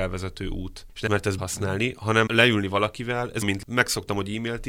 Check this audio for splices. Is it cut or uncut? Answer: cut